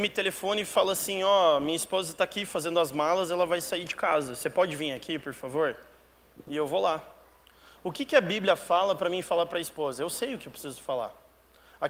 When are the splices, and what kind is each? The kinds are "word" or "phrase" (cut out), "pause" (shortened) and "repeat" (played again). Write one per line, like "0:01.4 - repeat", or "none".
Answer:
none

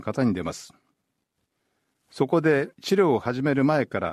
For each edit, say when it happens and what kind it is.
0:02.7 - pause

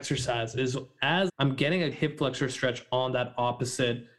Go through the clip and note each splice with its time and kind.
0:01.3 - phrase
0:01.9 - word

